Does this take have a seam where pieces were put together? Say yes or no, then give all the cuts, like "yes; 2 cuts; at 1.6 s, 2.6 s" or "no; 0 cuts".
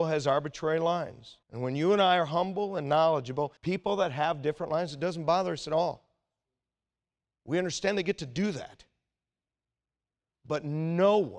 yes; 2 cuts; at 1.4 s, 3.6 s